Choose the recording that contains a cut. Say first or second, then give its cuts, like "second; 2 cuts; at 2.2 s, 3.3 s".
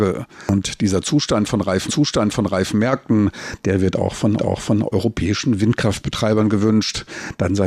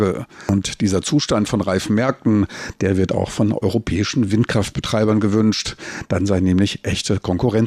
first; 2 cuts; at 1.9 s, 4.4 s